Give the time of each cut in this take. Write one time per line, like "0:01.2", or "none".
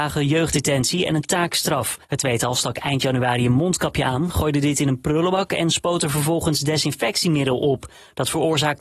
0:02.0